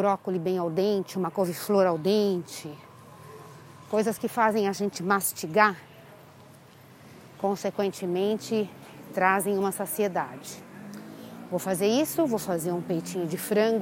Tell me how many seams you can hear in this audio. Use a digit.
0